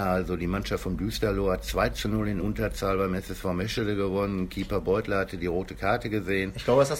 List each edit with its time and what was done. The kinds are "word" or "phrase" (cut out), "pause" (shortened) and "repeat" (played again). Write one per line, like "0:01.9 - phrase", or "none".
none